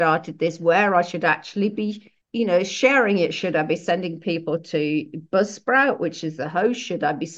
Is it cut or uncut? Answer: cut